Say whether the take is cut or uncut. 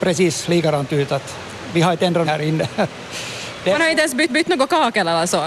cut